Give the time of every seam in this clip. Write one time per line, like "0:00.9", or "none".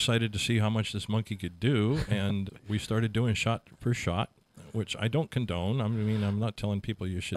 0:02.5